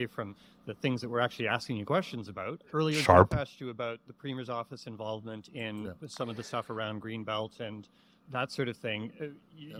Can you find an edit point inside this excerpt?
no; 0 cuts

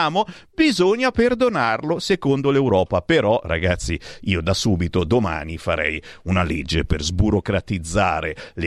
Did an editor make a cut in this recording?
no; 0 cuts

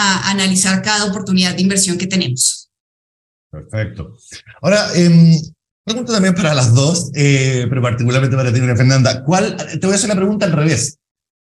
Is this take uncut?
yes; 0 cuts

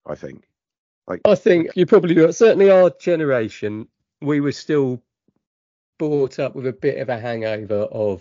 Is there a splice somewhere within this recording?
yes; 2 cuts; at 1.7 s, 5.9 s

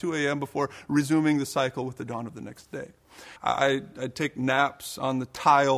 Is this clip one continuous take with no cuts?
no; 1 cut; at 3.4 s

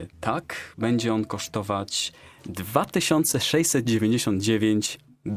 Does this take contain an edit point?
no; 0 cuts

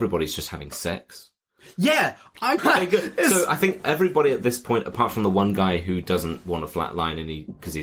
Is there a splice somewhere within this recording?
yes; 1 cut; at 2.6 s

